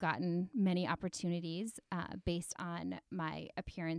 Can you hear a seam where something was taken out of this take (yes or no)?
no